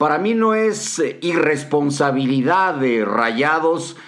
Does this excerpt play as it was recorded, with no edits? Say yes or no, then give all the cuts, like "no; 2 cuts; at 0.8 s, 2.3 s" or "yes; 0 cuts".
yes; 0 cuts